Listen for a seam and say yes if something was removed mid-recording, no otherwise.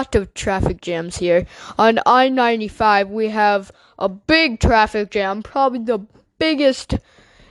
no